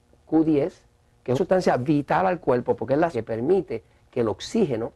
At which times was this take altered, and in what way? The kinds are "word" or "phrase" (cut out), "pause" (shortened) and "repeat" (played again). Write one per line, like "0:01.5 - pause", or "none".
0:01.3 - word
0:03.1 - word